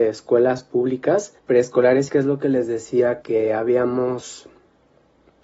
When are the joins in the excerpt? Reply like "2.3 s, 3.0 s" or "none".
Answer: 1.4 s, 2.1 s, 3.2 s